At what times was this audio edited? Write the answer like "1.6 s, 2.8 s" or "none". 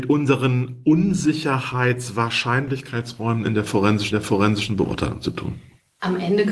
4.1 s